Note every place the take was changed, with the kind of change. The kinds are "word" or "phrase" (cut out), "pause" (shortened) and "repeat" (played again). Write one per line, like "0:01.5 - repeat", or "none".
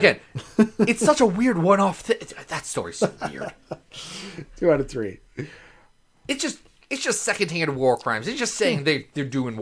none